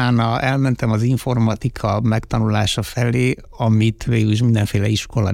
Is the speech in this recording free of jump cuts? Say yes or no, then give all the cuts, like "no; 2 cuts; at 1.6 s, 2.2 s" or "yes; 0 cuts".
yes; 0 cuts